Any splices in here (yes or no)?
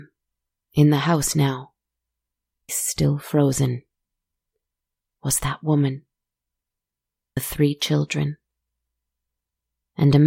yes